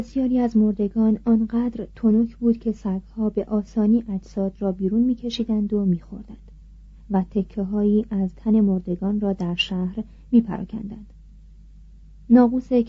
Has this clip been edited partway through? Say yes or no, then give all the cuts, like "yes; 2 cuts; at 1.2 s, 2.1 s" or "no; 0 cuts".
no; 0 cuts